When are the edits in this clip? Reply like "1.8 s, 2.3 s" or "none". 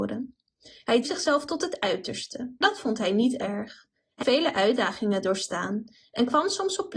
1.0 s, 2.6 s, 4.2 s